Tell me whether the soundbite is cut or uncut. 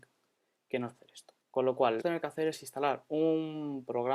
cut